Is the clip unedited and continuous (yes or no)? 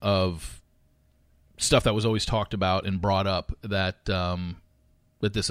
yes